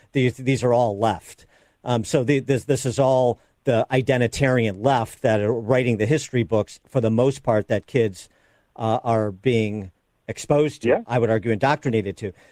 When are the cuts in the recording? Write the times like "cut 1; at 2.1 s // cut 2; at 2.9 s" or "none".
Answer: none